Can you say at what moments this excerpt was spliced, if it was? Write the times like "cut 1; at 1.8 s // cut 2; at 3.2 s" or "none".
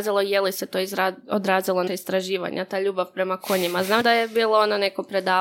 cut 1; at 1.9 s // cut 2; at 4.0 s